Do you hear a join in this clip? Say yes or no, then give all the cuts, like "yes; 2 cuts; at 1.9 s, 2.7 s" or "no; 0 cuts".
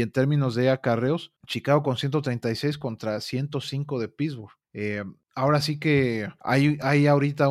no; 0 cuts